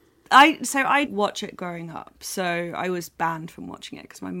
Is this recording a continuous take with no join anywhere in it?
no; 2 cuts; at 1.0 s, 3.2 s

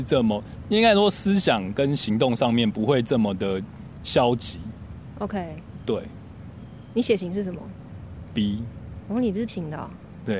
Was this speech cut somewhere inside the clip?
yes; 1 cut; at 9.5 s

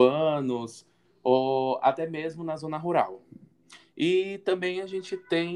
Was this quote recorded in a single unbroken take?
yes; 0 cuts

